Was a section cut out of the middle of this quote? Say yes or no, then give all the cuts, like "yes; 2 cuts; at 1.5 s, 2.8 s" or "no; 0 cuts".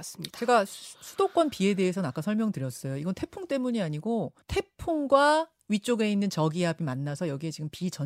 yes; 1 cut; at 4.4 s